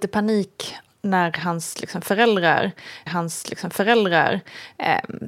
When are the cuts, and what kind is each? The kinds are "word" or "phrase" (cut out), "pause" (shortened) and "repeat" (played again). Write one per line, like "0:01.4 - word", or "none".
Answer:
0:03.1 - repeat